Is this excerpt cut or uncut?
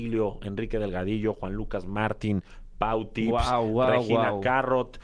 uncut